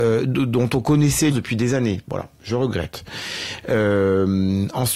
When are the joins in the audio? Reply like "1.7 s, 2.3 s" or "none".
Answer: 1.3 s